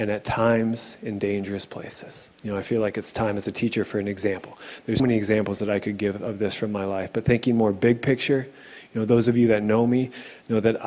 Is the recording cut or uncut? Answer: cut